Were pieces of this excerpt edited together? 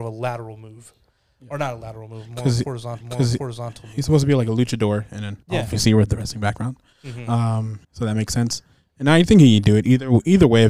yes; 3 cuts; at 3.0 s, 5.4 s, 7.8 s

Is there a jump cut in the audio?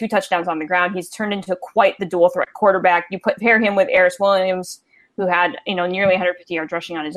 no; 0 cuts

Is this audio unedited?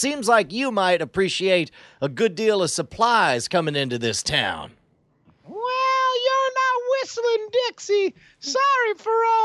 yes; 0 cuts

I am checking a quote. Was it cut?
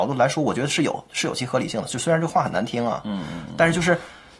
no; 0 cuts

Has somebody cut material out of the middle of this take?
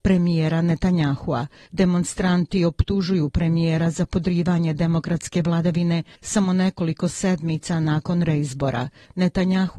no; 0 cuts

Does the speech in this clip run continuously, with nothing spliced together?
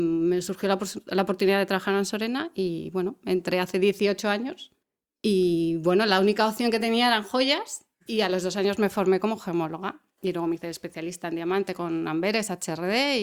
no; 3 cuts; at 4.8 s, 7.9 s, 10.1 s

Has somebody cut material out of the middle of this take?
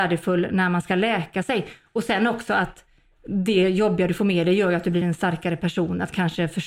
no; 0 cuts

